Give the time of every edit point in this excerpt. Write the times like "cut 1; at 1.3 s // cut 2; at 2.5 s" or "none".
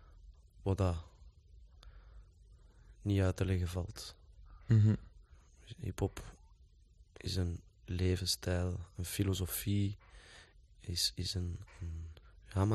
none

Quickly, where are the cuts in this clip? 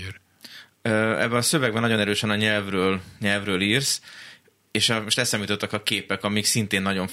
none

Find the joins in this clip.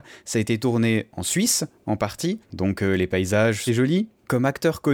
cut 1; at 2.4 s // cut 2; at 3.7 s

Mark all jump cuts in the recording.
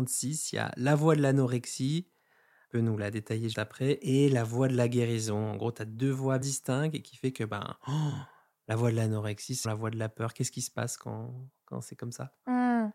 cut 1; at 3.5 s // cut 2; at 6.4 s // cut 3; at 9.6 s

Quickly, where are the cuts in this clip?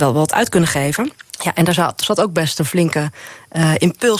cut 1; at 1.2 s

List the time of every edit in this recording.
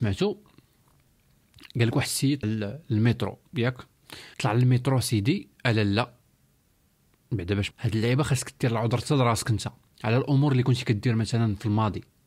cut 1; at 2.4 s // cut 2; at 4.3 s // cut 3; at 7.7 s

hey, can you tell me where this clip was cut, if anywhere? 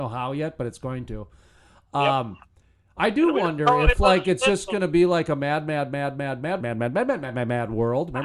cut 1; at 4.0 s // cut 2; at 6.6 s

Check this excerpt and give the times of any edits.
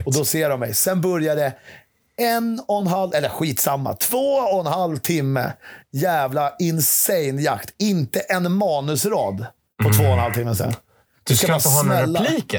none

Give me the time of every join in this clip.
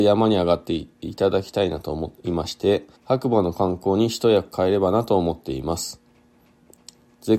cut 1; at 2.9 s

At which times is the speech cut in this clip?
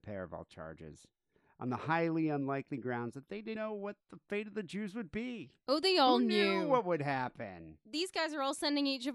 cut 1; at 3.6 s // cut 2; at 4.0 s

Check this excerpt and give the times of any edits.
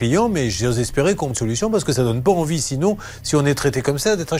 cut 1; at 1.3 s

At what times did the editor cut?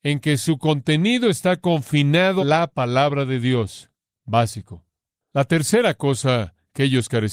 cut 1; at 2.4 s

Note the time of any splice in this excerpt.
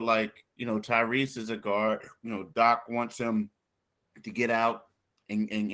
cut 1; at 2.2 s

